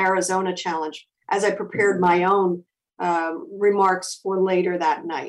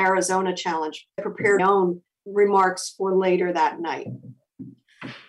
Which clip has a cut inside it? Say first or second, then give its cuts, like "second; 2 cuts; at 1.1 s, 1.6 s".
second; 3 cuts; at 1.2 s, 1.6 s, 2.3 s